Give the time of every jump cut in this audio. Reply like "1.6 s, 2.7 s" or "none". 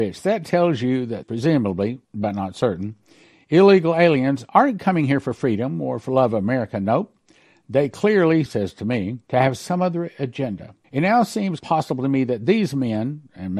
1.2 s, 2.0 s, 8.4 s, 9.2 s, 10.8 s, 11.6 s